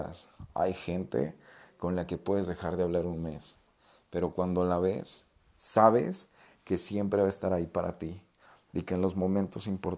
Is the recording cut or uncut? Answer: uncut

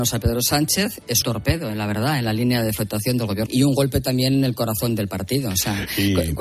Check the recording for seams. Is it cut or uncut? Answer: cut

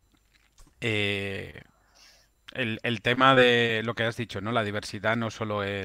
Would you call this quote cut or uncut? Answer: uncut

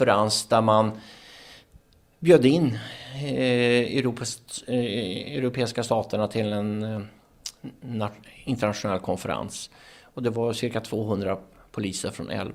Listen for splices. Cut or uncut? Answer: uncut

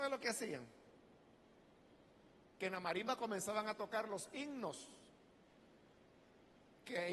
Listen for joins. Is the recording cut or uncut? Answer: uncut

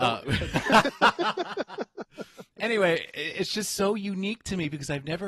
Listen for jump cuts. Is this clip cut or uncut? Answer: uncut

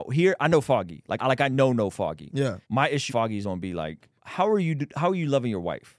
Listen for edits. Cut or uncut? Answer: cut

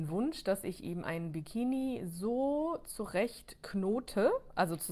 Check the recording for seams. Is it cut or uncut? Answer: uncut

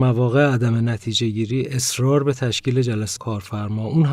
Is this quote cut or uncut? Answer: cut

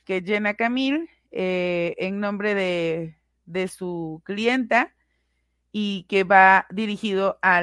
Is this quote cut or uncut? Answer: uncut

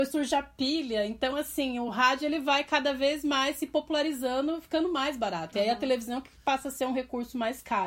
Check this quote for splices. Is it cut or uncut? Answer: uncut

